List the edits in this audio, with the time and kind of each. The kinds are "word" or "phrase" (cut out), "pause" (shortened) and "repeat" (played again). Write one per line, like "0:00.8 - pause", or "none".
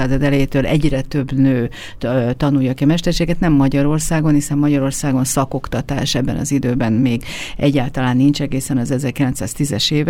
none